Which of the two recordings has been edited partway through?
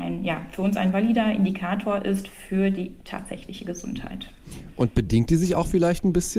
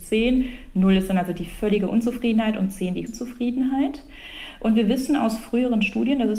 second; 1 cut; at 3.1 s

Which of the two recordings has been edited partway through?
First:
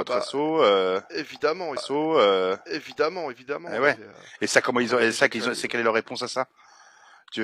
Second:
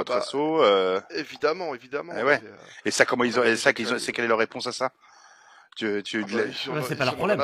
first; 1 cut; at 1.8 s

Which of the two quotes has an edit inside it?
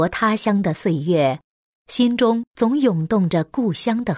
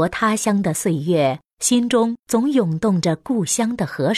second; 1 cut; at 1.5 s

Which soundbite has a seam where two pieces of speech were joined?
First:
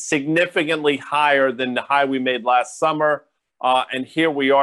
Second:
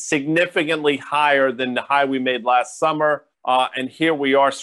second; 1 cut; at 3.3 s

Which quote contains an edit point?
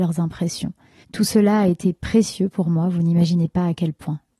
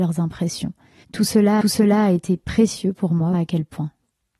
second; 2 cuts; at 1.6 s, 3.3 s

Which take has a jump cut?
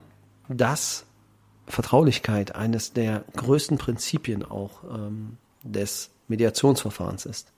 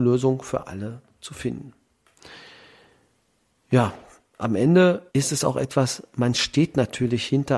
second; 1 cut; at 5.1 s

